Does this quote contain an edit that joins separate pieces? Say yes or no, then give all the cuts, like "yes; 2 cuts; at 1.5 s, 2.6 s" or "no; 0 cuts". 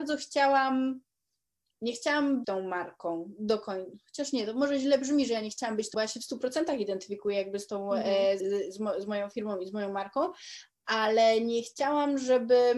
yes; 3 cuts; at 2.4 s, 5.9 s, 8.4 s